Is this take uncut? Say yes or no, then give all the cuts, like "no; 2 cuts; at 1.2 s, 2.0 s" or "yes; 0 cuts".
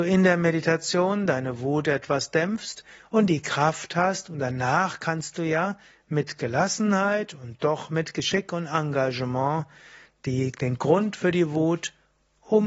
yes; 0 cuts